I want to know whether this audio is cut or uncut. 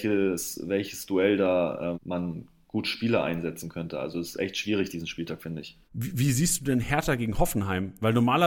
cut